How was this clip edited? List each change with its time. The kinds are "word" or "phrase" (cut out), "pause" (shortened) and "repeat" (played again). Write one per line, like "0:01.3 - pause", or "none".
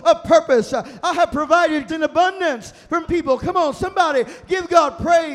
0:01.9 - word
0:03.0 - word